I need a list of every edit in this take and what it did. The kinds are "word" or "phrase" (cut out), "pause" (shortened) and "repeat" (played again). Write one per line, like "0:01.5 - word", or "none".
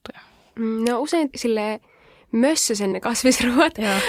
0:01.3 - word
0:02.9 - word